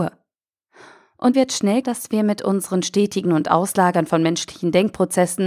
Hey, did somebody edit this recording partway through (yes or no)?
yes